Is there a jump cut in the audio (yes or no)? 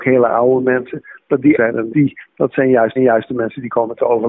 yes